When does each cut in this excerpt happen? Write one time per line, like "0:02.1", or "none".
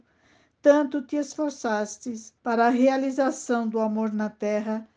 0:02.4